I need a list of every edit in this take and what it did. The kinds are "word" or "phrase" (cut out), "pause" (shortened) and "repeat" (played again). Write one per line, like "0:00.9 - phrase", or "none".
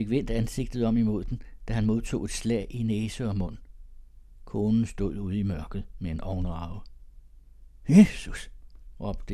none